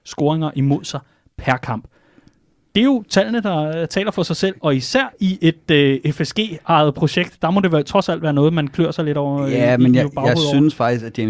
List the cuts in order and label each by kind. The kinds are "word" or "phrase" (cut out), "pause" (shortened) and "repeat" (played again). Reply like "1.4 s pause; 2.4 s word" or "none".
none

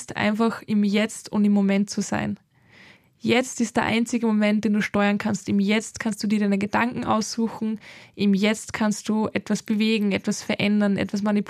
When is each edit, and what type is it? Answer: none

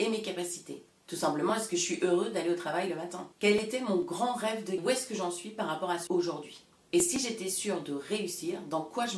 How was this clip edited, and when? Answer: 3.3 s pause; 4.8 s phrase; 6.1 s word

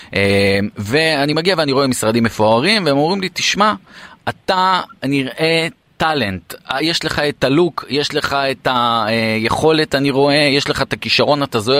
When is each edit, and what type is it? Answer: none

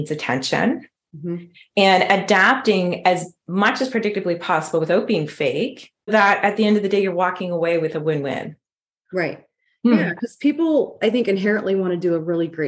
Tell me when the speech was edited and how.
6.1 s word

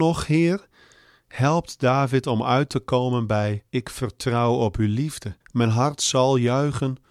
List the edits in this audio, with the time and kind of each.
3.7 s pause; 5.4 s pause

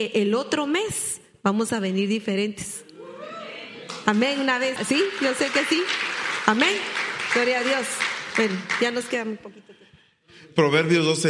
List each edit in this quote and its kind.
4.8 s word

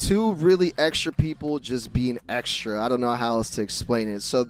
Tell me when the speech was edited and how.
none

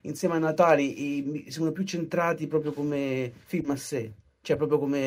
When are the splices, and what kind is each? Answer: 3.4 s pause

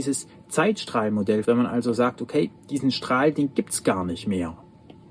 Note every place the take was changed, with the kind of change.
1.4 s word; 2.6 s pause

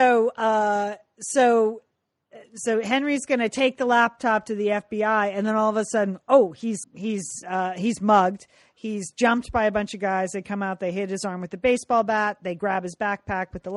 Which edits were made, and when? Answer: 6.8 s word

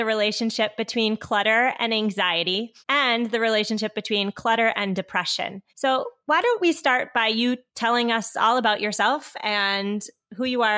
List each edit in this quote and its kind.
2.8 s pause; 5.7 s pause

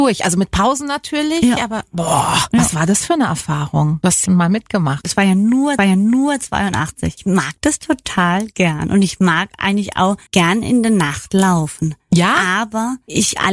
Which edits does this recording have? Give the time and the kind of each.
4.3 s word; 5.8 s repeat; 10.3 s pause

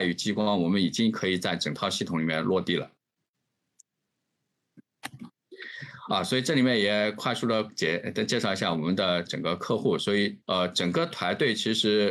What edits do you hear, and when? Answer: 10.4 s pause

